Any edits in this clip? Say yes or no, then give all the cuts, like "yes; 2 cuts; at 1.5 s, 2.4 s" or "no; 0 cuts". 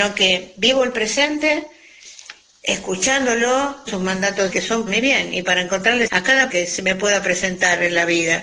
yes; 5 cuts; at 3.9 s, 4.5 s, 4.9 s, 6.1 s, 6.5 s